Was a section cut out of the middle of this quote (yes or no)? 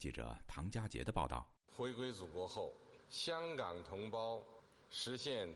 yes